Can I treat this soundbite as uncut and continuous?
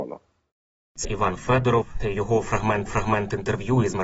no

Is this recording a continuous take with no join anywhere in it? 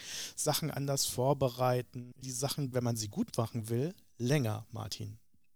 no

